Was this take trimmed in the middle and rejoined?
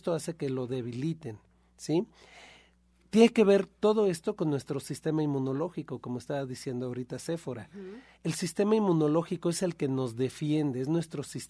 no; 0 cuts

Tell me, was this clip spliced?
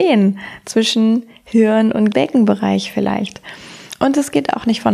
yes; 1 cut; at 2.1 s

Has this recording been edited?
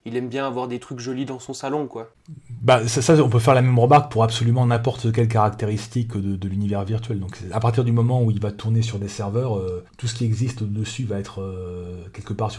yes; 1 cut; at 9.9 s

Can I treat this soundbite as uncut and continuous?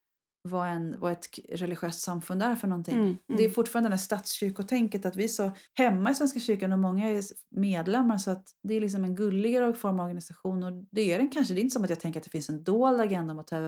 no; 2 cuts; at 5.7 s, 8.6 s

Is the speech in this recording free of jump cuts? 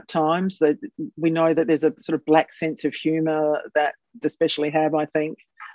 no; 1 cut; at 4.2 s

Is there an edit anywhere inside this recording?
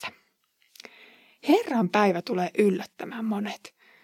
no; 0 cuts

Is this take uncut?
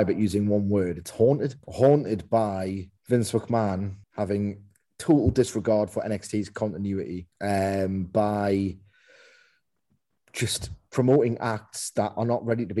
no; 4 cuts; at 1.6 s, 3.0 s, 4.0 s, 7.3 s

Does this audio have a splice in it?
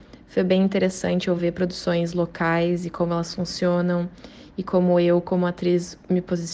no; 0 cuts

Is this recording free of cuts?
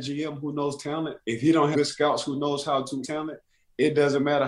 no; 3 cuts; at 1.2 s, 1.7 s, 3.0 s

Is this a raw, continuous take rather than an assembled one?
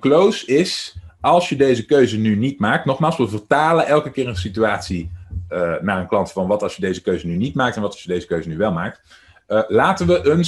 yes; 0 cuts

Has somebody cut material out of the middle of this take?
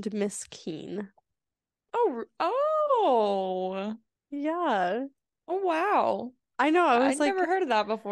no; 0 cuts

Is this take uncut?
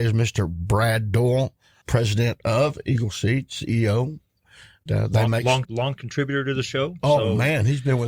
no; 4 cuts; at 1.8 s, 4.9 s, 5.6 s, 6.0 s

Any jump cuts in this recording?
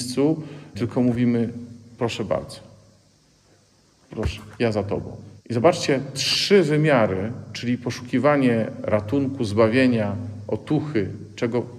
yes; 3 cuts; at 4.5 s, 5.4 s, 6.1 s

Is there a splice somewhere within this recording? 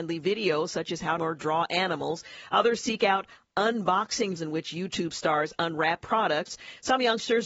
yes; 3 cuts; at 1.2 s, 4.4 s, 6.0 s

